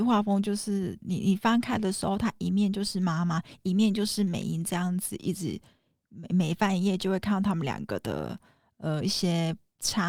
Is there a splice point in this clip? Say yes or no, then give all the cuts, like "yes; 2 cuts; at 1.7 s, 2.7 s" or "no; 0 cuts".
no; 0 cuts